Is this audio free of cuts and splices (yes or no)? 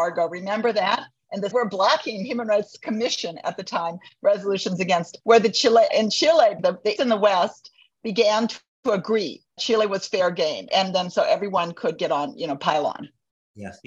no